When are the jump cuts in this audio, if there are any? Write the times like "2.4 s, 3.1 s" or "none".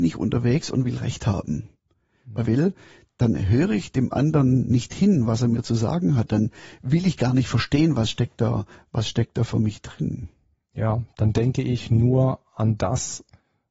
2.5 s